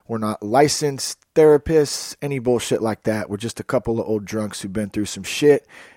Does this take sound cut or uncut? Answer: uncut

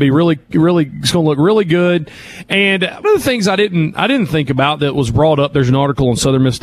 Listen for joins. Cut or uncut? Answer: cut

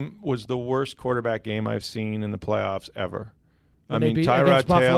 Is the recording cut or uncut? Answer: uncut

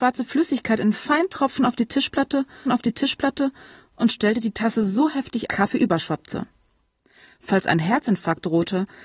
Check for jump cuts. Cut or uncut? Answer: cut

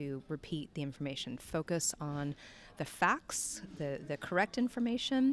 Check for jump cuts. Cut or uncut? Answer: uncut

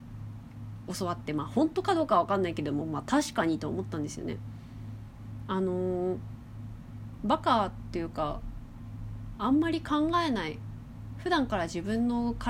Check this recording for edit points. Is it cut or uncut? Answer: uncut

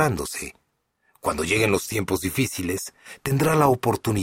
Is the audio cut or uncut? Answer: uncut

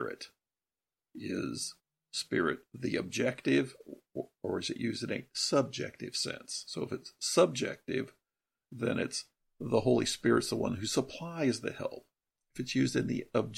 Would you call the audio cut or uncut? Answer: uncut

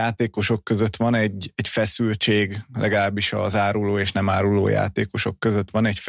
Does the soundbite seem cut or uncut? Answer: uncut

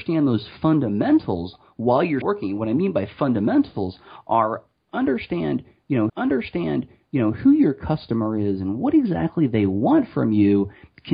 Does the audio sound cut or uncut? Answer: cut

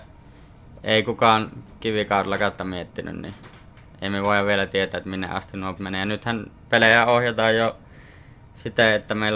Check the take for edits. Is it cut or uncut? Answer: cut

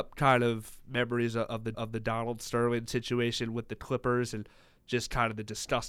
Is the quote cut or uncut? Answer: cut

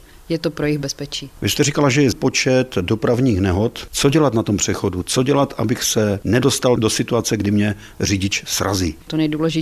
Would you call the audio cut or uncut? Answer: cut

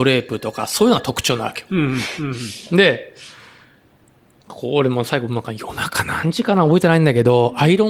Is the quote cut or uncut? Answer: uncut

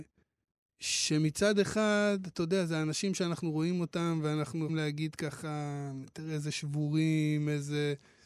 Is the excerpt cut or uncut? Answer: cut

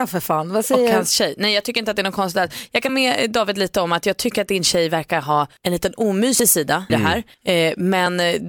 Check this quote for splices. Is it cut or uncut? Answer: cut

